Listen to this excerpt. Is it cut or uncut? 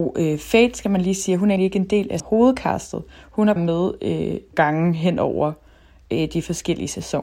cut